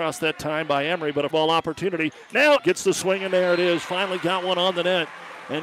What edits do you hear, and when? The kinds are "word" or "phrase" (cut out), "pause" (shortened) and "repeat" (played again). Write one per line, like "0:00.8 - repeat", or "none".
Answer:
0:01.3 - word
0:02.6 - word